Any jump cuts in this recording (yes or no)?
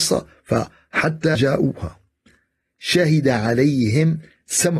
yes